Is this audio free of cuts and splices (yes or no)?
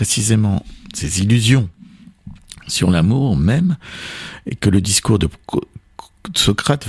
yes